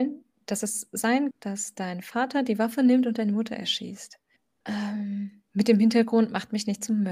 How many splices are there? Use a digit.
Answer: 1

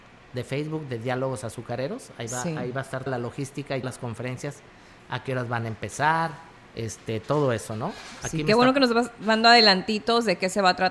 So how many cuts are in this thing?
2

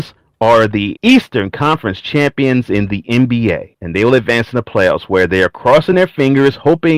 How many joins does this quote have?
0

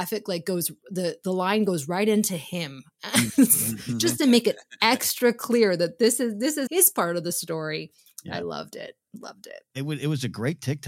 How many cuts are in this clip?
1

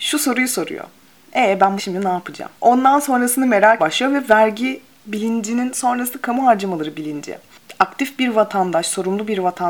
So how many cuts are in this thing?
3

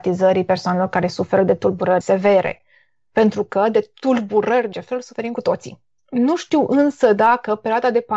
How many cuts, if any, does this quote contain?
2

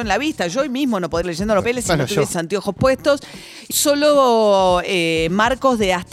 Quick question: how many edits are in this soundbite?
4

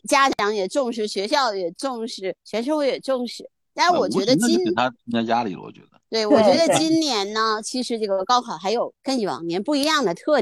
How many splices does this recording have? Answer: 2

